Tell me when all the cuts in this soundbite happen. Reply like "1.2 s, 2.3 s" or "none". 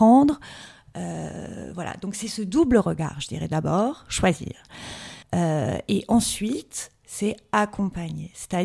5.2 s